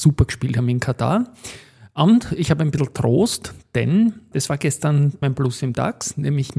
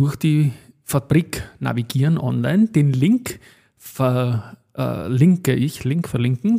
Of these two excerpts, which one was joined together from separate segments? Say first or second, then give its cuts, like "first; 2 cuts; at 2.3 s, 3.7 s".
first; 2 cuts; at 4.3 s, 5.2 s